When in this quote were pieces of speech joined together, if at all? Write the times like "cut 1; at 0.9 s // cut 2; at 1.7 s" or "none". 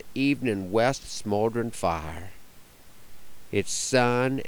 cut 1; at 1.0 s